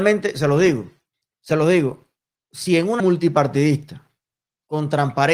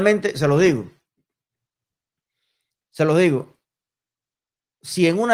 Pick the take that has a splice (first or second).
first